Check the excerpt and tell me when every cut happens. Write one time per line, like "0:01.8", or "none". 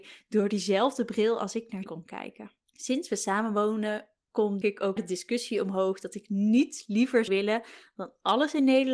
0:01.8
0:02.6
0:04.6
0:05.0
0:07.3

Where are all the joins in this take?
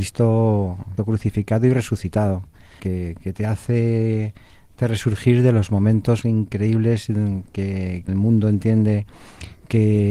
0:01.0
0:02.8
0:03.3
0:04.8
0:06.2
0:08.1

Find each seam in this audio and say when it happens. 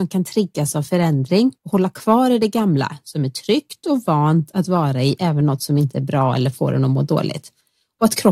0:01.6
0:05.4

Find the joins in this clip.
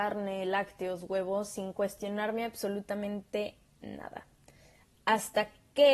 none

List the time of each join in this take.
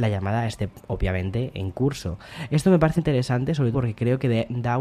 0:03.0
0:03.7

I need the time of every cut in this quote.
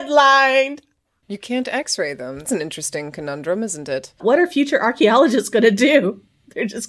0:02.4

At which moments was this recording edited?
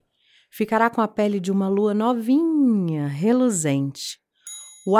none

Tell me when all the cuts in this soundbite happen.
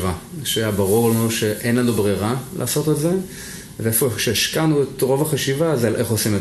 none

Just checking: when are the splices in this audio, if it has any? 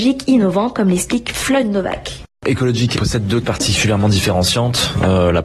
0:03.0
0:03.4

